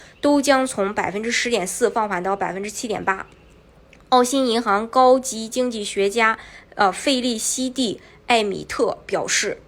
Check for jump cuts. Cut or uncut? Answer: uncut